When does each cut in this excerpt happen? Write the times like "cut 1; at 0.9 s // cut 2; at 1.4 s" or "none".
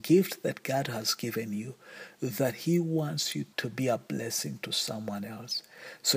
cut 1; at 3.5 s